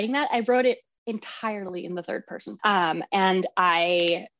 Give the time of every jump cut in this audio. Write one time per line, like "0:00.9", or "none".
0:02.6